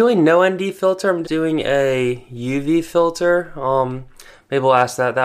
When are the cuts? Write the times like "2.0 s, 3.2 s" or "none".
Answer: 1.2 s

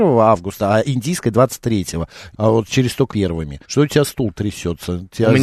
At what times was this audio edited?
2.3 s, 3.1 s, 3.6 s

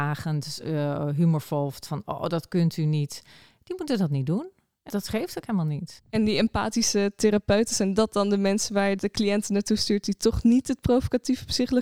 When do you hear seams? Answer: 1.9 s, 4.9 s, 9.0 s

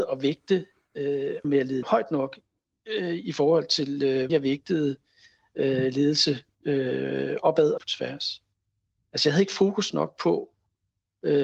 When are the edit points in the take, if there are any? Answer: 1.4 s, 1.8 s, 4.3 s, 7.8 s

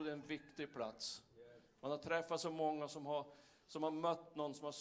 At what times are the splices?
none

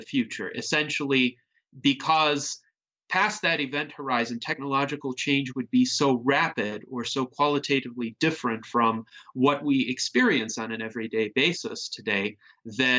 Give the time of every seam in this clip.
none

